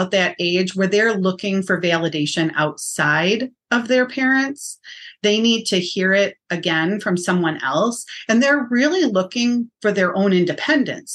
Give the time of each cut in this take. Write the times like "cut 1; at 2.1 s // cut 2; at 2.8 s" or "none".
cut 1; at 9.8 s

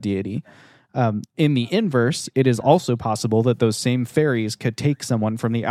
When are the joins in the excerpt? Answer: none

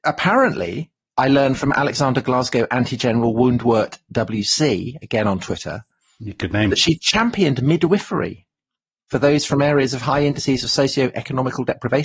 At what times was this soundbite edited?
none

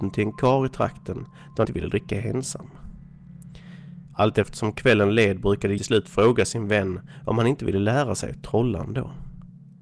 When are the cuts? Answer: cut 1; at 1.6 s // cut 2; at 5.8 s

